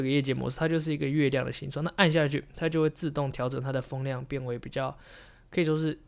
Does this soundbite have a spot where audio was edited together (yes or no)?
no